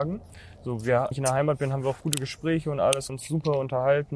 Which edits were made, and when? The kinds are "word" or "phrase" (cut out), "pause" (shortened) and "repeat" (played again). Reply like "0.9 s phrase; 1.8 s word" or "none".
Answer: 1.1 s phrase; 3.1 s word